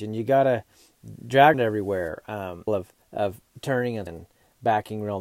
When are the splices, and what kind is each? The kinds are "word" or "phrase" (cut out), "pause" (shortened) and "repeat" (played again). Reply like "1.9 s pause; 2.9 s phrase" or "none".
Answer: 1.5 s phrase; 2.7 s phrase; 3.0 s pause; 4.1 s word